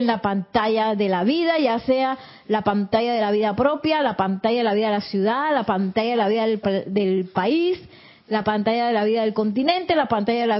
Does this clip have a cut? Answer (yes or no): no